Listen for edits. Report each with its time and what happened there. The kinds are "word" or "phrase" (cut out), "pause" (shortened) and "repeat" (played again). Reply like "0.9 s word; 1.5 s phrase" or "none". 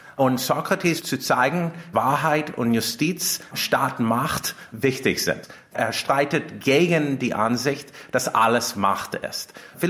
1.0 s word; 1.9 s word